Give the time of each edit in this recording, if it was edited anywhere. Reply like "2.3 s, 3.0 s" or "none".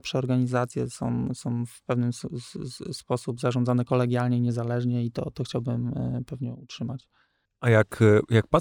none

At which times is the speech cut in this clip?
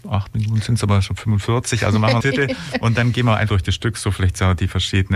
2.2 s, 3.5 s

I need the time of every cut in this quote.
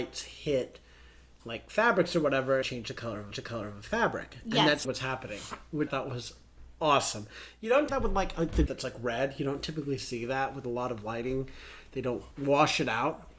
2.6 s, 3.3 s, 4.8 s, 5.9 s, 7.9 s, 8.7 s, 12.3 s

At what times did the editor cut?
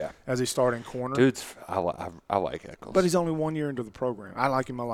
none

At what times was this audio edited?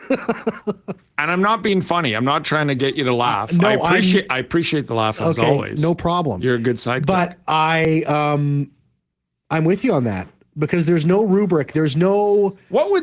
none

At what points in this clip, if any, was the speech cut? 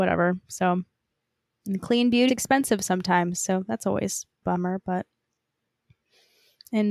2.3 s, 4.4 s

